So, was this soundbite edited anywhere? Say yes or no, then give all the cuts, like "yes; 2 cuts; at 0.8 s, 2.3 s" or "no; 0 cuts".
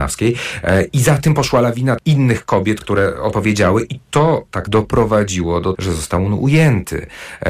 yes; 6 cuts; at 0.9 s, 2.0 s, 2.8 s, 3.3 s, 4.7 s, 5.7 s